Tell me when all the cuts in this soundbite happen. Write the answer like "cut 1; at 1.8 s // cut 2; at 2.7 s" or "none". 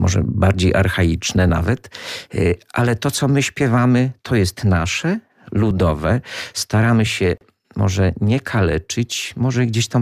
none